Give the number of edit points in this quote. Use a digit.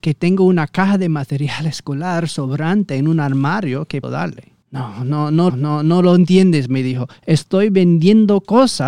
3